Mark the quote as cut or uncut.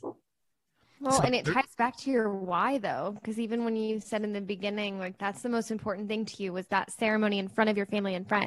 uncut